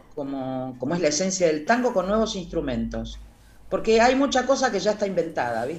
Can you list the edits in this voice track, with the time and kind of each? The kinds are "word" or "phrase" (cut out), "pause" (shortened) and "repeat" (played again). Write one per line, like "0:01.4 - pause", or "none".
0:01.7 - phrase

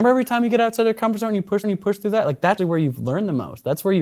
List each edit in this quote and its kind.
0:01.6 - repeat
0:02.6 - word

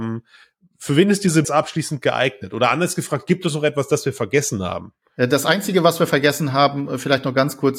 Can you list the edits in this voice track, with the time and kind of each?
0:01.4 - phrase

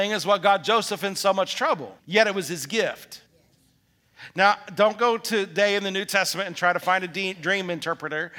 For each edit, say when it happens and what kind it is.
0:02.0 - pause
0:03.3 - pause

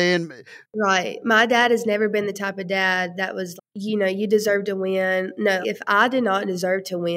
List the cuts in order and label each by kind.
0:03.6 - word
0:05.6 - word

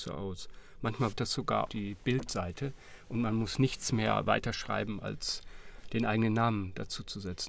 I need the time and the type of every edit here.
0:01.1 - word
0:01.7 - word

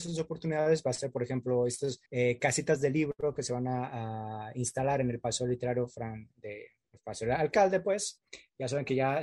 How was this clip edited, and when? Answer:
0:02.1 - pause

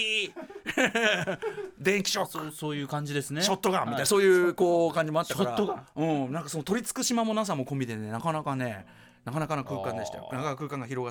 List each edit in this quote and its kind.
none

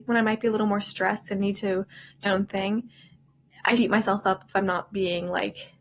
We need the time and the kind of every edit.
0:02.2 - word
0:03.8 - word

